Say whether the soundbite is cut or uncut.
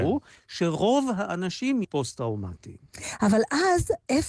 cut